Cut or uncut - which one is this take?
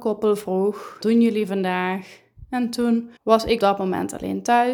cut